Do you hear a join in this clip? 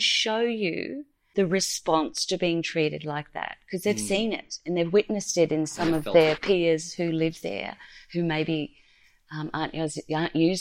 no; 0 cuts

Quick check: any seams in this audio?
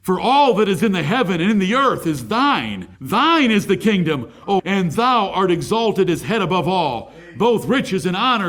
yes; 2 cuts; at 2.9 s, 4.6 s

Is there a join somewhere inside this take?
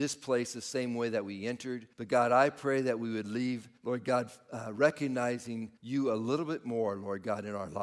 yes; 3 cuts; at 1.9 s, 3.8 s, 5.8 s

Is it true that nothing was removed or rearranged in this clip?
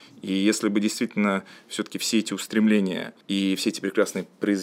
no; 1 cut; at 3.2 s

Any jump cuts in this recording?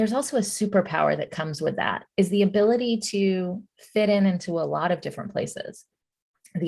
yes; 1 cut; at 2.1 s

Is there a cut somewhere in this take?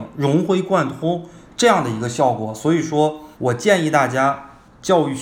yes; 1 cut; at 3.3 s

